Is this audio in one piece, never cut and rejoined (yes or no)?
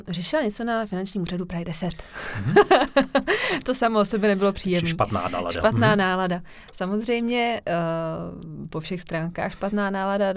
yes